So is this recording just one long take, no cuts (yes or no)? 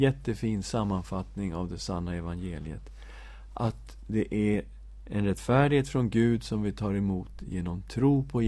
yes